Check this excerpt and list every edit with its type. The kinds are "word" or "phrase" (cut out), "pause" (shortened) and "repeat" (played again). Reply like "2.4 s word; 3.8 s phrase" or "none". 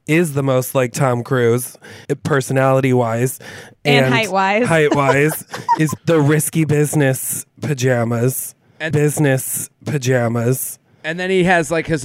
2.0 s pause; 6.0 s phrase; 8.9 s repeat